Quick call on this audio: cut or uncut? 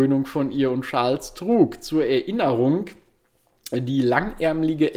uncut